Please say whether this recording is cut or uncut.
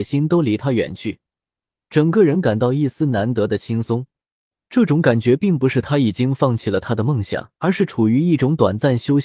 cut